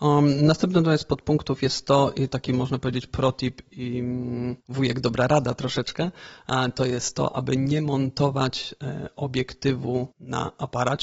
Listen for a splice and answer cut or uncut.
cut